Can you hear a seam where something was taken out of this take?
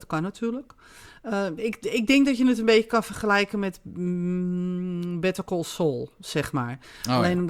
no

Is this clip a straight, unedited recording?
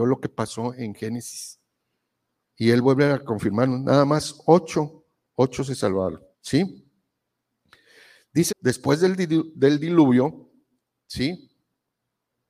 no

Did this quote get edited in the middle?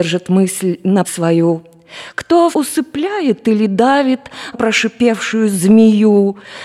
yes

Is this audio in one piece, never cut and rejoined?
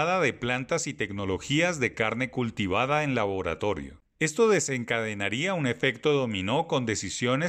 yes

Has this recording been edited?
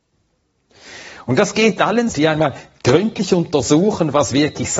yes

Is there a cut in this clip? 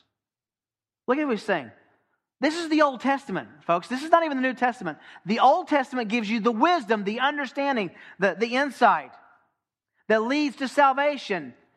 no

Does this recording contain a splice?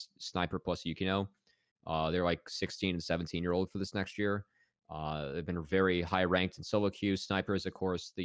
no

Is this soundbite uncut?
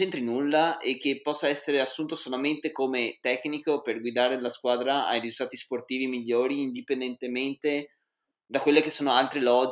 yes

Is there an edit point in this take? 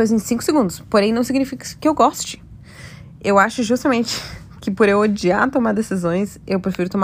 no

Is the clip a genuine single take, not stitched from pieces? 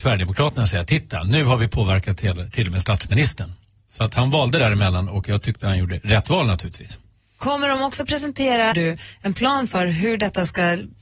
no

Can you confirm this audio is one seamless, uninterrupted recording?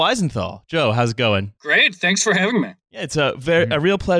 no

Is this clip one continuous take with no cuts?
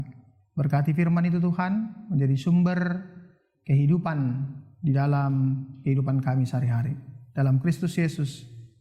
yes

